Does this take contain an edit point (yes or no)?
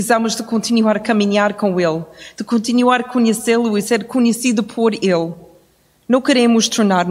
no